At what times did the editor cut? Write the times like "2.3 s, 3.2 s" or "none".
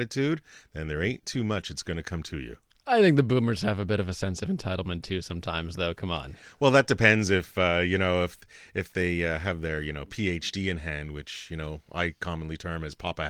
none